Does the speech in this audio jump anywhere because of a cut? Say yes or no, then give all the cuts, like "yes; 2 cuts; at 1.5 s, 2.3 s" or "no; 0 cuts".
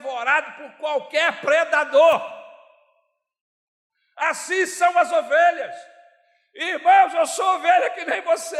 no; 0 cuts